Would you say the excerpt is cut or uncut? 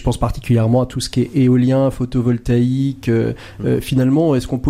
uncut